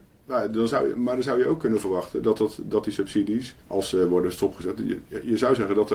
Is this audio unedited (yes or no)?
no